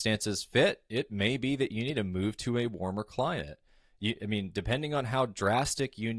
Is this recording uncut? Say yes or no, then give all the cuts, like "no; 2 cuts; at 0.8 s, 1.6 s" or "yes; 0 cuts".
yes; 0 cuts